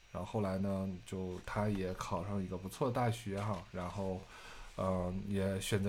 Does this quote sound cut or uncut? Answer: uncut